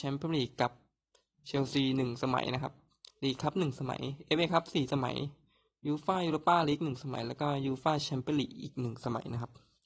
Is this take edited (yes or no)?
no